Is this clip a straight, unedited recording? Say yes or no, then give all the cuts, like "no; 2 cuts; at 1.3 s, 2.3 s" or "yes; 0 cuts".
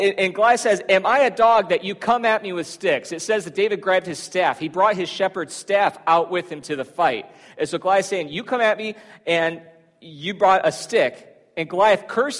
yes; 0 cuts